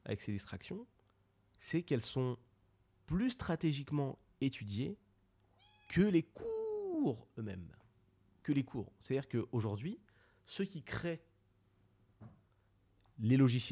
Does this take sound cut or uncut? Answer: uncut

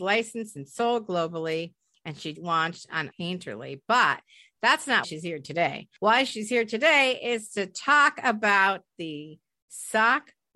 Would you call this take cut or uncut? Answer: cut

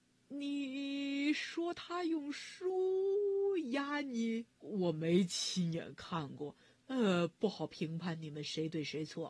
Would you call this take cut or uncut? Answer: cut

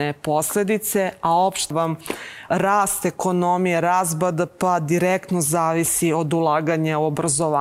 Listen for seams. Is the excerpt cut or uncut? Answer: cut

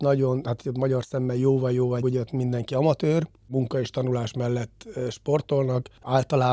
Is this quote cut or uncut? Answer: cut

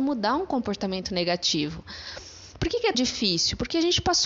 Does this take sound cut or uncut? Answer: cut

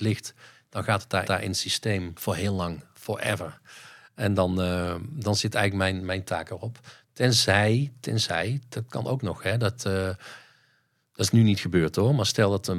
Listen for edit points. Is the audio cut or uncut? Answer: cut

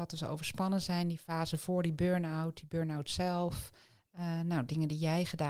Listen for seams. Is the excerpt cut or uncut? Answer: uncut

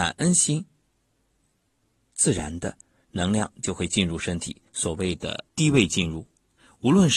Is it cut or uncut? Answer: cut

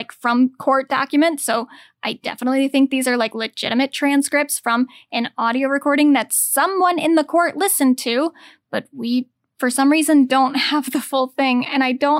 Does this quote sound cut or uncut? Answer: uncut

